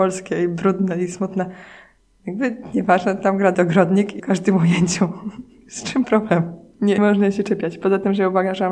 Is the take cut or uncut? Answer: cut